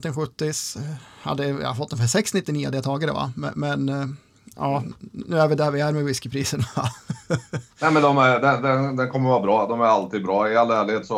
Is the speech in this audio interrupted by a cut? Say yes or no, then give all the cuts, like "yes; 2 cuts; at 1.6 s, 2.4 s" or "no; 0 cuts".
no; 0 cuts